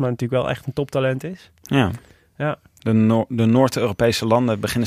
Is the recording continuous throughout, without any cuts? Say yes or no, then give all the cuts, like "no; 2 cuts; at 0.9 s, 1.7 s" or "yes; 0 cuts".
yes; 0 cuts